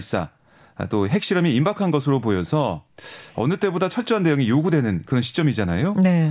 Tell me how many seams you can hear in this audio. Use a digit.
1